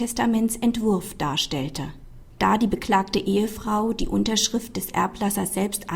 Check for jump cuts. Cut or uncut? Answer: uncut